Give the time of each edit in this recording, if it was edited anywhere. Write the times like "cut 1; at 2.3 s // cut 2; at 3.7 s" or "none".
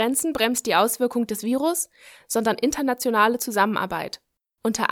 none